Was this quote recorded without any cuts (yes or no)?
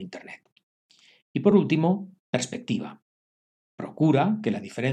yes